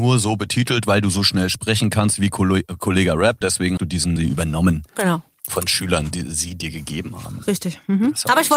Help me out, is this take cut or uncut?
cut